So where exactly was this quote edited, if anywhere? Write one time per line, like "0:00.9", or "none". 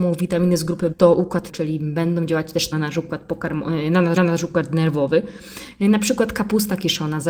0:00.9
0:01.5
0:02.7
0:04.2